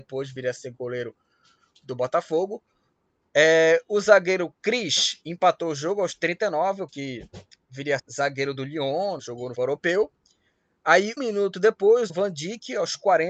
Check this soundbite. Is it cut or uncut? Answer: cut